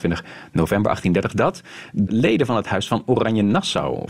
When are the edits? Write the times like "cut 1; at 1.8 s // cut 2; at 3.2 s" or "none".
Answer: cut 1; at 2.1 s